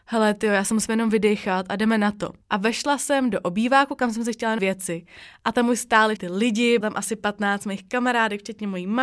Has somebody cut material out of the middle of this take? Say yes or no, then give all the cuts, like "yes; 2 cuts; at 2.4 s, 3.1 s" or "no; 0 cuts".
yes; 4 cuts; at 2.4 s, 4.6 s, 6.2 s, 6.8 s